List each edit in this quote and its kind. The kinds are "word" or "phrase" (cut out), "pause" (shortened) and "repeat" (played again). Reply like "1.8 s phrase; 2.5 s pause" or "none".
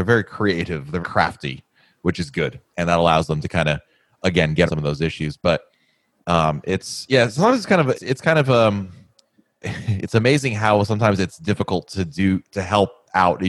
1.0 s word; 4.7 s word; 7.9 s word; 9.6 s word